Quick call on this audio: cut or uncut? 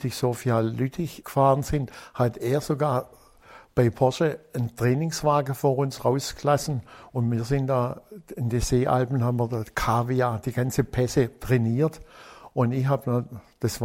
cut